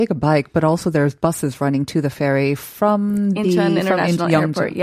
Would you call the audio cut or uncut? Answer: uncut